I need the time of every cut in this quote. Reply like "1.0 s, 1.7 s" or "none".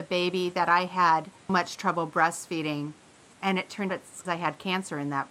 1.5 s, 3.3 s, 3.9 s, 4.3 s